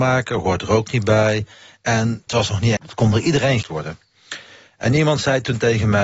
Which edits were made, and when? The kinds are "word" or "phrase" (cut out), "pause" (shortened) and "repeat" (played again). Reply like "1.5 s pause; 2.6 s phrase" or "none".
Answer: 2.3 s word; 2.8 s word; 3.6 s word